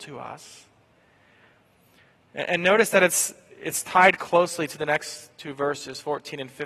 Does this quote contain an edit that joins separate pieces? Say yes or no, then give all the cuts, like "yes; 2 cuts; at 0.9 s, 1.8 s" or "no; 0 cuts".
no; 0 cuts